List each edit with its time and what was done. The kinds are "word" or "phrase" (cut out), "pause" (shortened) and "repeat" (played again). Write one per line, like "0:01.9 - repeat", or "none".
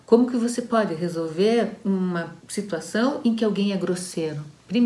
0:02.4 - pause